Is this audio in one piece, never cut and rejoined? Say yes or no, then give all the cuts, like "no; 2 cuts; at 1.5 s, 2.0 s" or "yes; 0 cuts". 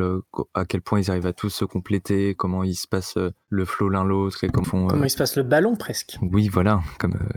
no; 1 cut; at 4.6 s